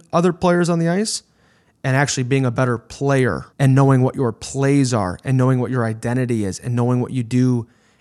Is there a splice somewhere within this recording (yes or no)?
yes